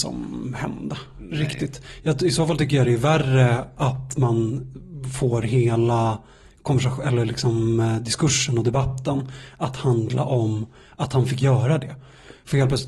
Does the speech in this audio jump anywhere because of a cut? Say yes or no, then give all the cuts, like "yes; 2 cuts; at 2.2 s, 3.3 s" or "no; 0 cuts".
no; 0 cuts